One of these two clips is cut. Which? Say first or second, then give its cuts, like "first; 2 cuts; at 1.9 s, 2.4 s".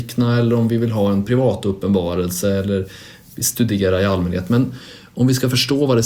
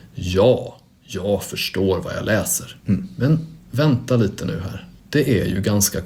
second; 2 cuts; at 2.8 s, 3.6 s